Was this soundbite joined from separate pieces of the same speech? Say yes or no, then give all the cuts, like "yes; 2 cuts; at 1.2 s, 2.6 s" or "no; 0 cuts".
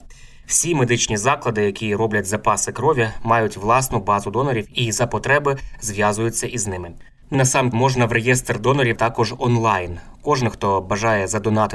yes; 3 cuts; at 7.3 s, 7.7 s, 9.0 s